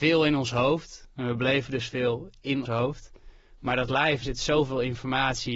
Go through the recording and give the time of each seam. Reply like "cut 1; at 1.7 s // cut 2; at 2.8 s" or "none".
cut 1; at 2.6 s // cut 2; at 4.2 s